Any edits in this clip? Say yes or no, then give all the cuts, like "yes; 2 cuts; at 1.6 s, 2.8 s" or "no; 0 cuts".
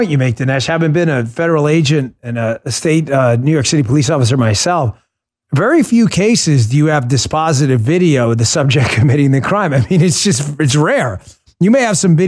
no; 0 cuts